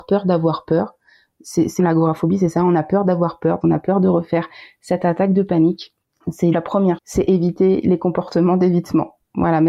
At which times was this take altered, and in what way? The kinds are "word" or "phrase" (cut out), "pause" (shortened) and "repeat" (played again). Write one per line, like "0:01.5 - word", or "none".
0:01.8 - word
0:03.6 - word
0:06.5 - word
0:07.0 - word